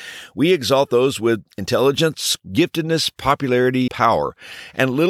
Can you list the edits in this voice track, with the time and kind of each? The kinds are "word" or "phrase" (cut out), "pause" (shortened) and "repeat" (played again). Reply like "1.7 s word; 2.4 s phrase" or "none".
2.4 s word; 3.9 s word